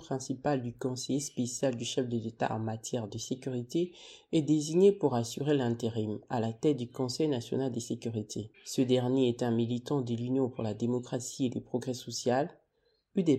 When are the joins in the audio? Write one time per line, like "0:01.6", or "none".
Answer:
0:08.5